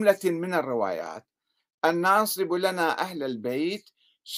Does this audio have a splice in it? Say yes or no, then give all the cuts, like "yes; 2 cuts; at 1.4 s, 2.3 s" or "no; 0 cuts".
no; 0 cuts